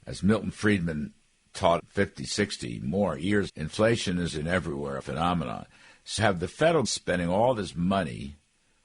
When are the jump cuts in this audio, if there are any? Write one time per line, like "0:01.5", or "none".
0:01.8
0:03.5
0:04.3
0:05.0
0:06.2
0:06.8